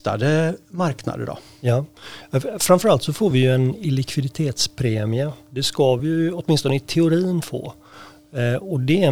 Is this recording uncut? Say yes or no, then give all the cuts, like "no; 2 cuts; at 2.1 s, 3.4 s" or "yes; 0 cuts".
yes; 0 cuts